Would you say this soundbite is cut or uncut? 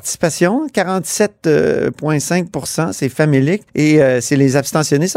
cut